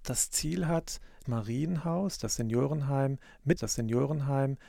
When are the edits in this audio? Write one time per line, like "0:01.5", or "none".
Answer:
0:01.2
0:03.6

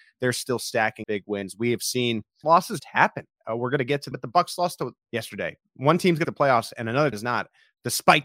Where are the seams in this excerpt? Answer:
0:01.0
0:02.4
0:02.8
0:04.1
0:05.0
0:06.2
0:07.1

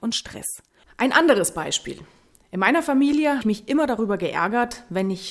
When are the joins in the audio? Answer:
0:03.4

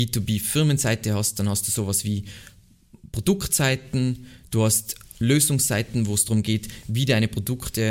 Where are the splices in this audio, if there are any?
none

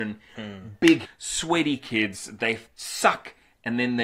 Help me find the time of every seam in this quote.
0:01.1
0:02.7

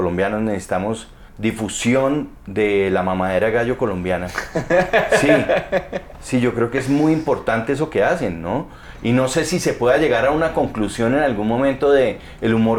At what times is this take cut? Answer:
0:01.3

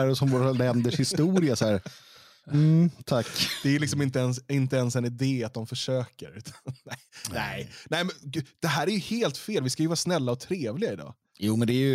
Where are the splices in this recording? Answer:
none

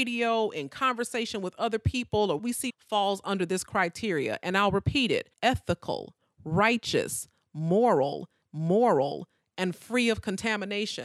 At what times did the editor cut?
0:02.4
0:02.7
0:05.3
0:08.4

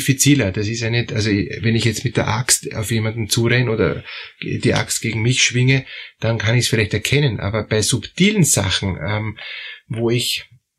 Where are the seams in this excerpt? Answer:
none

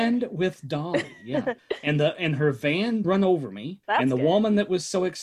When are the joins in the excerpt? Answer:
0:01.6
0:03.0
0:03.8

